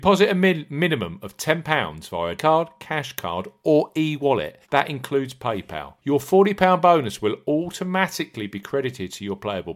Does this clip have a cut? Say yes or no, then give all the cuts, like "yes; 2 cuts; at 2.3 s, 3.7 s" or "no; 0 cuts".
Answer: yes; 3 cuts; at 2.4 s, 4.6 s, 6.0 s